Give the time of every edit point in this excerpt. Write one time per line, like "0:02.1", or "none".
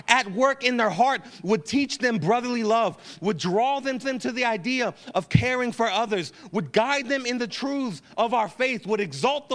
0:04.0